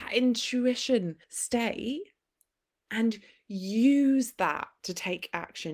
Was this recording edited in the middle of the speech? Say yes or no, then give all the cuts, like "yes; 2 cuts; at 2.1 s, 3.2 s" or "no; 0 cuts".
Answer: yes; 1 cut; at 1.2 s